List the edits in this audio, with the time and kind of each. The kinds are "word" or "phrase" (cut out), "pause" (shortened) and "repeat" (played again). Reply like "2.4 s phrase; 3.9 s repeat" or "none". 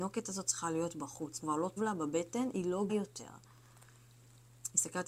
1.4 s word; 1.8 s word; 2.9 s word

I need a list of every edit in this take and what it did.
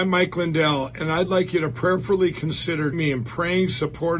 2.9 s word

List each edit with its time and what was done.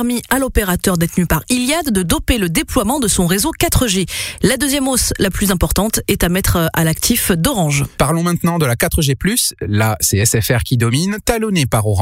none

